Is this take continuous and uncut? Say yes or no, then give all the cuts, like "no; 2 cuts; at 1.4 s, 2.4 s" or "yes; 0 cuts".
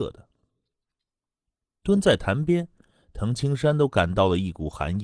yes; 0 cuts